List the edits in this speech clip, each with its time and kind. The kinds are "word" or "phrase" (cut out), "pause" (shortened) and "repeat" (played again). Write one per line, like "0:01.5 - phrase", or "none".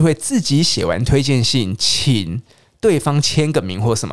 none